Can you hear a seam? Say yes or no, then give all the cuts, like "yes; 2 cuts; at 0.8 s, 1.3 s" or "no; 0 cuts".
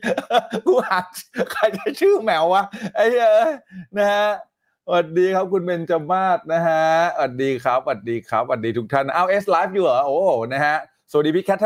no; 0 cuts